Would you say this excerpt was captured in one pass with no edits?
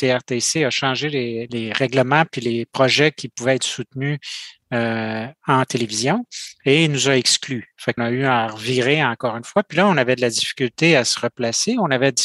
no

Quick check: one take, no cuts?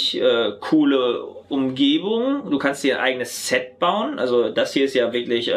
yes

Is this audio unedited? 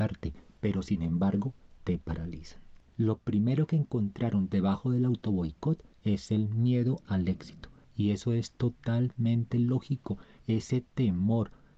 yes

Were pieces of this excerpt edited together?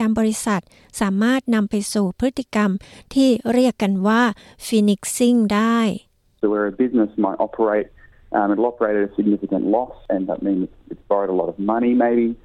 no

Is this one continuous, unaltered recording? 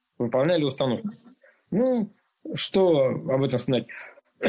yes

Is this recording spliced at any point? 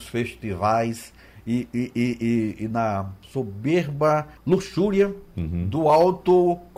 yes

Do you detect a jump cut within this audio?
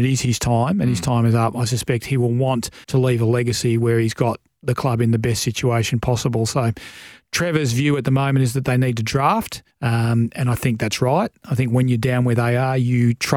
yes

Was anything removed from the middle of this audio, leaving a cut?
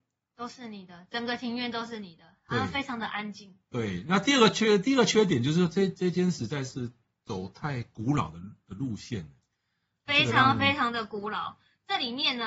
no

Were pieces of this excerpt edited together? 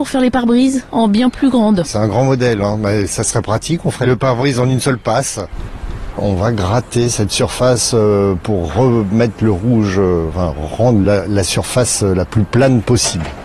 no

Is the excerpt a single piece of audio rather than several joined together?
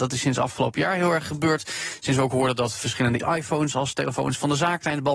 no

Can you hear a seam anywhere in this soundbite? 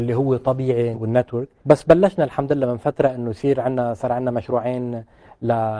yes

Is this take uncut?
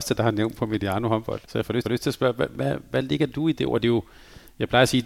no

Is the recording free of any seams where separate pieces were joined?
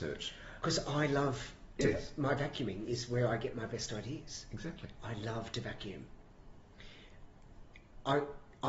yes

